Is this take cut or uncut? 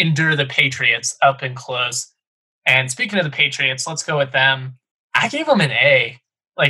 cut